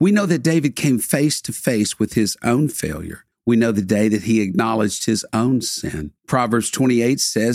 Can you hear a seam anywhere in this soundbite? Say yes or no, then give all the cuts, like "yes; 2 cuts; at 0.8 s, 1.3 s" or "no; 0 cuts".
yes; 2 cuts; at 3.3 s, 6.2 s